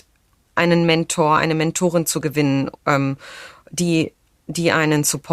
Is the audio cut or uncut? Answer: cut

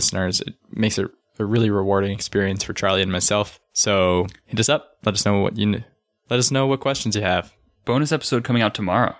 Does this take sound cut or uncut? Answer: uncut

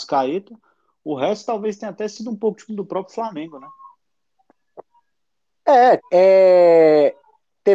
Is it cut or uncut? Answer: cut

